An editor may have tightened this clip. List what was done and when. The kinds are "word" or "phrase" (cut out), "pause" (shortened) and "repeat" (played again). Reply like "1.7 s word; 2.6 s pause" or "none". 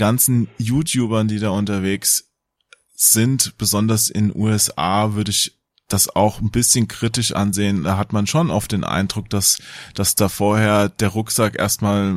none

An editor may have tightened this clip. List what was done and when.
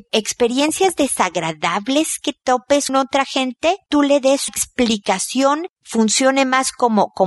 2.9 s word; 4.5 s word; 5.8 s word

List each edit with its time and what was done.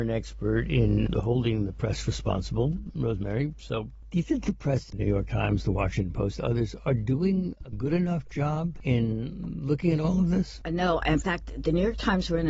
4.2 s word

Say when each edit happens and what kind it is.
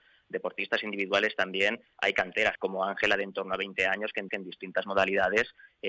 2.6 s word; 4.3 s repeat

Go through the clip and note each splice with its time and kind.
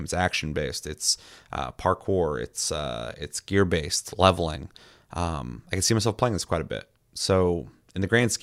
none

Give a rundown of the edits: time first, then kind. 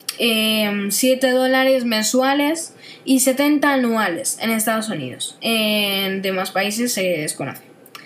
none

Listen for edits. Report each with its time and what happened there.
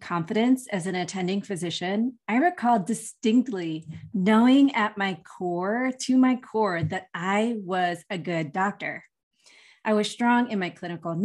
none

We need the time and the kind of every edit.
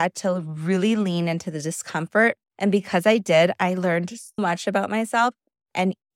2.4 s pause; 4.4 s word

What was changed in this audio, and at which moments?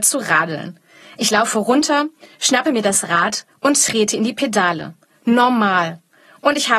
none

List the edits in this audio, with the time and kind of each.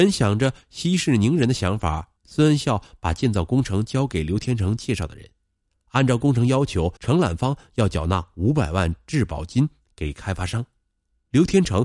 2.2 s pause; 7.0 s pause

